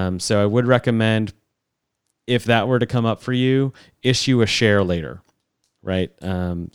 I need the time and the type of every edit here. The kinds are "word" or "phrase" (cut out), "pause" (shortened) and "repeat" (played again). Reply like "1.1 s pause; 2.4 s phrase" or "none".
none